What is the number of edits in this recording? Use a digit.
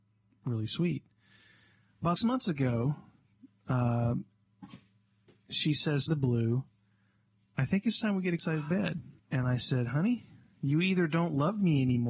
4